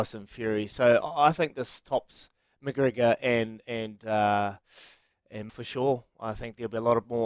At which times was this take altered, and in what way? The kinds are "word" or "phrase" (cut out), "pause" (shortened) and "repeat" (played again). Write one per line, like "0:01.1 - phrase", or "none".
0:05.5 - word